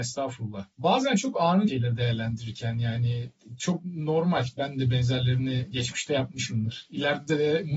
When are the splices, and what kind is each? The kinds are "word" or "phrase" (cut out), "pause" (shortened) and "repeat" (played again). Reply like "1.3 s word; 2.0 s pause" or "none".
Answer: 1.7 s phrase